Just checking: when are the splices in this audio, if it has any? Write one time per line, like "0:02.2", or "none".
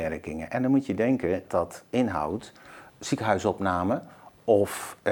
0:01.5
0:02.9